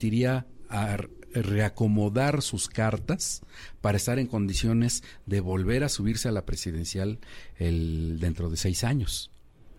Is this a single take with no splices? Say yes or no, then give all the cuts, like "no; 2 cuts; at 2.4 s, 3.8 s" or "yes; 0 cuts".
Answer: yes; 0 cuts